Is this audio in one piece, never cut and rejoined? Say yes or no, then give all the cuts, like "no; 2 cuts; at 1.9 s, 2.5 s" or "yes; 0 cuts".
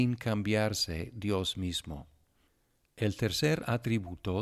yes; 0 cuts